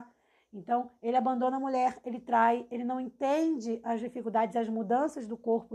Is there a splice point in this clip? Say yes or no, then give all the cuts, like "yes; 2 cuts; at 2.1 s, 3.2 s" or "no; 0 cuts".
no; 0 cuts